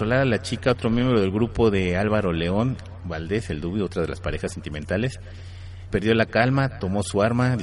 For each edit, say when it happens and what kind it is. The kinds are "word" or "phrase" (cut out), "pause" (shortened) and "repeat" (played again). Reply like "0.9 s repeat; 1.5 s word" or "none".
5.9 s word